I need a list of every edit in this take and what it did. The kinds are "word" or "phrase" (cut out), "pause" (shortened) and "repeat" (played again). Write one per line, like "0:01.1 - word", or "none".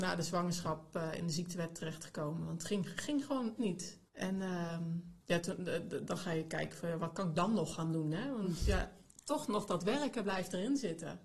0:03.6 - word
0:04.1 - pause
0:05.2 - pause